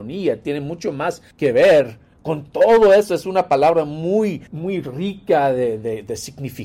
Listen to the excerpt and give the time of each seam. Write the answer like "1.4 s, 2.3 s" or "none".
1.3 s, 2.1 s, 4.5 s